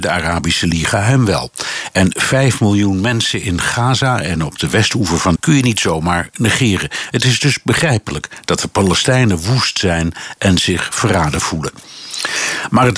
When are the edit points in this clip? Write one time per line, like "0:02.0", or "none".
0:05.4